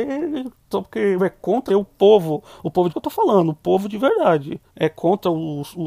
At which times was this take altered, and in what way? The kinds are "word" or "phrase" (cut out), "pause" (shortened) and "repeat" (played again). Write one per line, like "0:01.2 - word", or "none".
0:01.2 - phrase
0:01.7 - word
0:02.9 - phrase
0:04.7 - pause